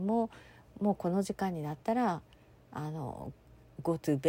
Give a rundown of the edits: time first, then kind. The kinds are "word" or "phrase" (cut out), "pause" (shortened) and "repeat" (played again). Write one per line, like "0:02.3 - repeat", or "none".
none

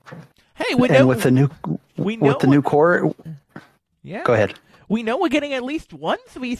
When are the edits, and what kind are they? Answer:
none

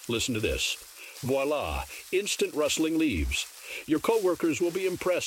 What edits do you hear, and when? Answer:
none

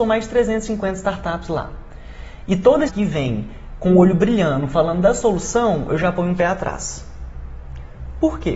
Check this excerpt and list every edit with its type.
0:02.9 - word

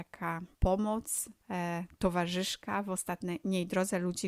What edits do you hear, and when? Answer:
none

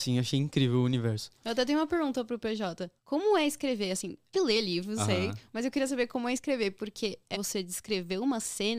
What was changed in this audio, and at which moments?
0:03.0 - pause
0:04.3 - word
0:05.0 - word
0:07.3 - phrase

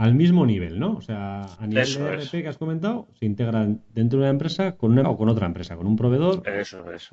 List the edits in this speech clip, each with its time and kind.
0:05.0 - word

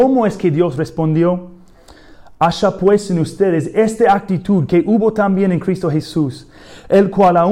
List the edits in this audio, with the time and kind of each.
none

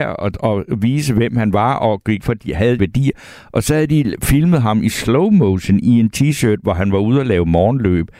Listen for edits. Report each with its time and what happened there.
0:02.2 - word
0:02.8 - phrase
0:06.1 - word

